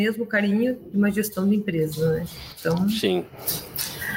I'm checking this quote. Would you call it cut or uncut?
uncut